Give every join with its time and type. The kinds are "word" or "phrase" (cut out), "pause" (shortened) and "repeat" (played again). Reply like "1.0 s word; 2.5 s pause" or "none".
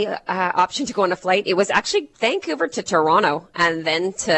2.1 s pause

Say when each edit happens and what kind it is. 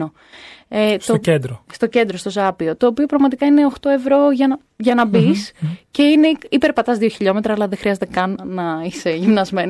8.4 s word

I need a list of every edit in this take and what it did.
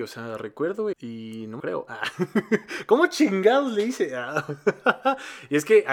0.9 s word; 1.6 s word

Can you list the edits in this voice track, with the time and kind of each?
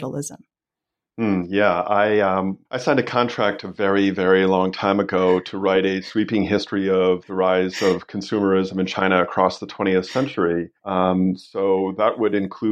2.7 s pause; 10.8 s pause

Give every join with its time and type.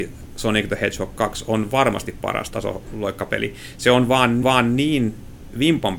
4.4 s repeat

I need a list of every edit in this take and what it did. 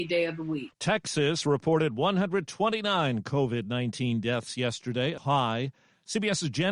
5.2 s word

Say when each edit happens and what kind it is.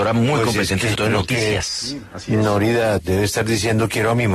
0.9 s word; 3.0 s word

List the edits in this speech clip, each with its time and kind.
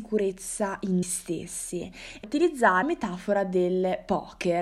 1.0 s word; 2.2 s word; 2.8 s word

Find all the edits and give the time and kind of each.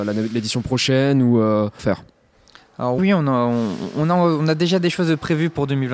1.8 s word; 3.0 s word

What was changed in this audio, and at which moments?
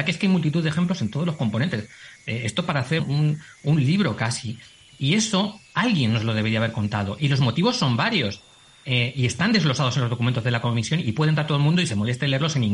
3.0 s word

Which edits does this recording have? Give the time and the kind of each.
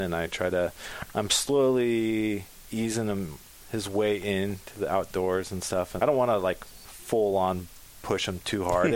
6.0 s word

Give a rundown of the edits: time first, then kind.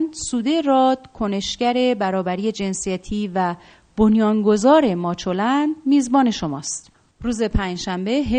none

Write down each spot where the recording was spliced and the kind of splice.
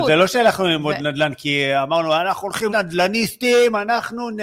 2.7 s word

